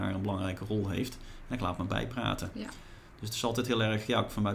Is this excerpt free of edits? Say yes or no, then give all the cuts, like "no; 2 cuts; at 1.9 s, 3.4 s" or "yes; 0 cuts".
yes; 0 cuts